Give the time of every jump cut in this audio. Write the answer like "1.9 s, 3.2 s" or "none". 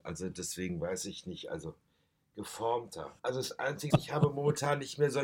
3.2 s, 3.9 s